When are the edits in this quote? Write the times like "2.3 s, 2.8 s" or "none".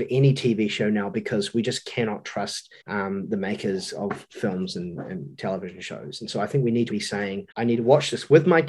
2.8 s, 6.9 s, 7.5 s